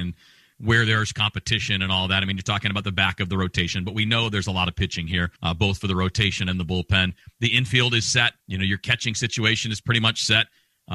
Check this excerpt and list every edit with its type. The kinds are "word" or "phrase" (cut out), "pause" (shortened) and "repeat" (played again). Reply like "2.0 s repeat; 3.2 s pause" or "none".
5.4 s pause; 8.4 s pause